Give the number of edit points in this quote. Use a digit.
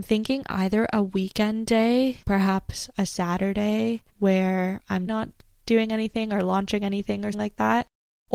4